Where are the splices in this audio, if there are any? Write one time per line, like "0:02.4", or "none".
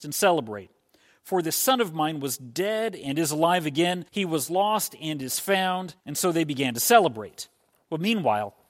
0:04.1
0:06.0